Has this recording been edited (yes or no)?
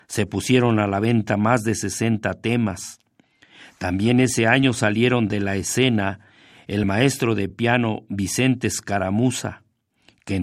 no